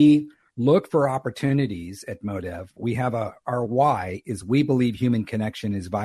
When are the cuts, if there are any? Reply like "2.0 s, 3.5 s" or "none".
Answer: none